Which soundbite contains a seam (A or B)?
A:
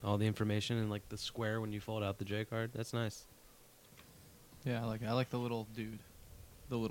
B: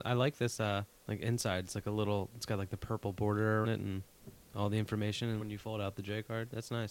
B